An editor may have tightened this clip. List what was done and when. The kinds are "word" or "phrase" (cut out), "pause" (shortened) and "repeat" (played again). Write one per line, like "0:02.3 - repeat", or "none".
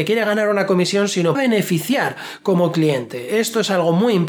0:01.3 - phrase